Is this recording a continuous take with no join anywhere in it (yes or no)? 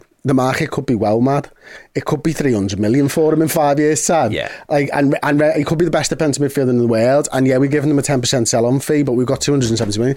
yes